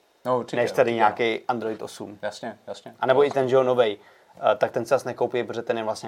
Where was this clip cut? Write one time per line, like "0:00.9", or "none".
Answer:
none